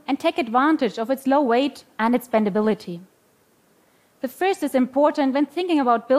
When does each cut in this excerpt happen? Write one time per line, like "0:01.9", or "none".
none

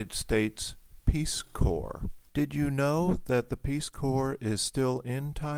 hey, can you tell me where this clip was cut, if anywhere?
0:02.3

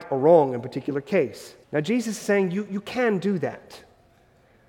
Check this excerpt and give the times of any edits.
0:01.6

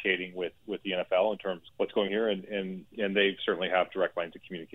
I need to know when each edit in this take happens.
0:01.7
0:02.1
0:02.9

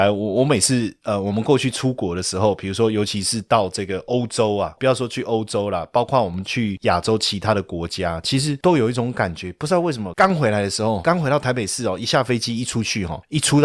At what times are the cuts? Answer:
0:11.0

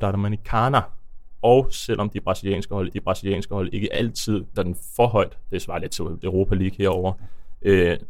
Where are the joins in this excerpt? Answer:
0:02.9
0:04.6
0:06.2

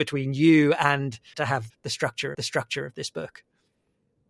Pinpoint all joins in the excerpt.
0:01.3
0:01.7
0:02.3

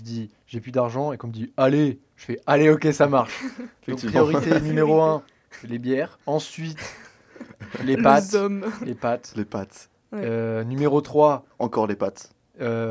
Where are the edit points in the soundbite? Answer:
0:06.2

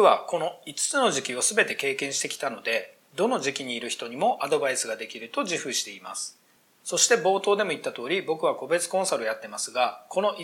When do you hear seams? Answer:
none

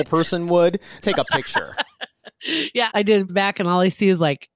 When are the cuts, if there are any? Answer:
0:01.0
0:02.9
0:03.3

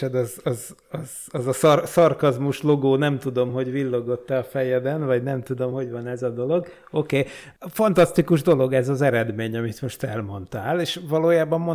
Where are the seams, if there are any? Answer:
none

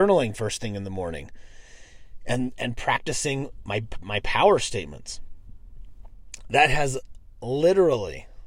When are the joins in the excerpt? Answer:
none

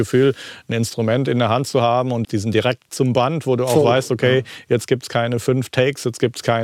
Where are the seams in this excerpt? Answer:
0:02.2
0:02.9

